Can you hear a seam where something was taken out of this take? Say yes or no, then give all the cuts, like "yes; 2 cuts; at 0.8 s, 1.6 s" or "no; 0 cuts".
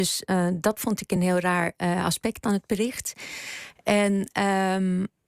no; 0 cuts